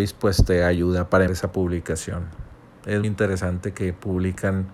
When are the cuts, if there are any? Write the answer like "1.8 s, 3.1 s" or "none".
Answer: 1.3 s, 3.0 s